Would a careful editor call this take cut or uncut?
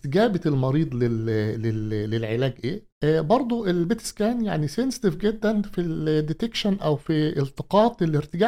cut